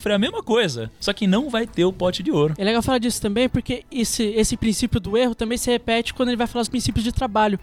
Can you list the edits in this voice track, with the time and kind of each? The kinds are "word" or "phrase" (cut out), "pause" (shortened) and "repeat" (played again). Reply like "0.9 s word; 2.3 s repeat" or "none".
6.7 s word